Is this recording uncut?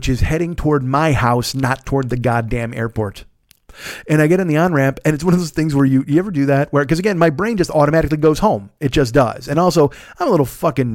yes; 0 cuts

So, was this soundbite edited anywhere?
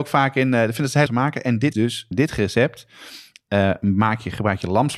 yes; 3 cuts; at 1.1 s, 1.7 s, 2.1 s

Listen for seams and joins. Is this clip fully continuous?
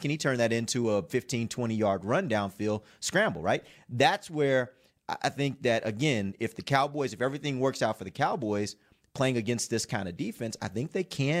yes; 0 cuts

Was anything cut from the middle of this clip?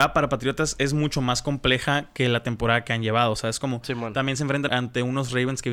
yes; 1 cut; at 4.7 s

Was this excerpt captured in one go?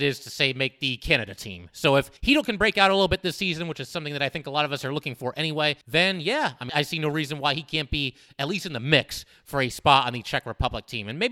no; 3 cuts; at 2.2 s, 5.8 s, 6.7 s

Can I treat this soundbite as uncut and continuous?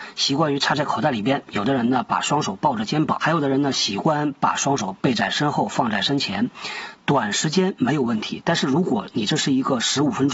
no; 1 cut; at 3.2 s

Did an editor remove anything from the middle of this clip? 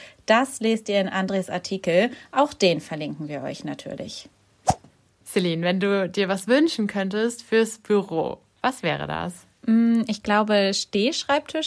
no; 0 cuts

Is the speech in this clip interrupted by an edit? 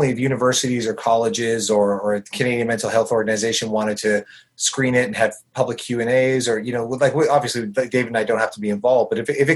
no; 0 cuts

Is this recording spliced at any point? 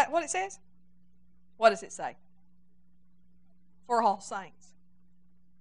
no; 0 cuts

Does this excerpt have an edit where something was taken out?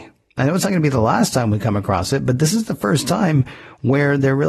no; 0 cuts

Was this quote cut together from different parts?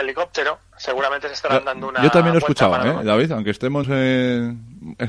yes; 1 cut; at 3.8 s

